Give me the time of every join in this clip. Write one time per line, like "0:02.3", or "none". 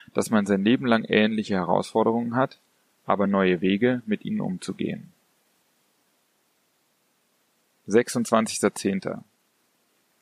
none